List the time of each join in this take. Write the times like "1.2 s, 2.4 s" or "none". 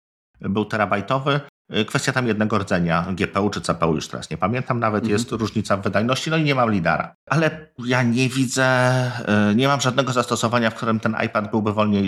7.2 s